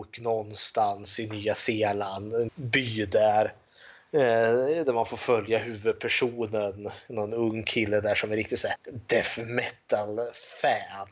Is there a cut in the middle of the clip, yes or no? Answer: yes